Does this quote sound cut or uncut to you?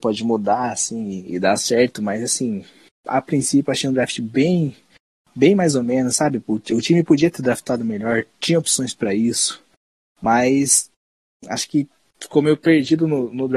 uncut